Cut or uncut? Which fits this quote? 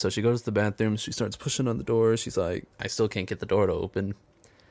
cut